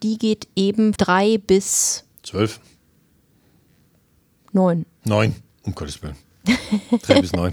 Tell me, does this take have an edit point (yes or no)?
yes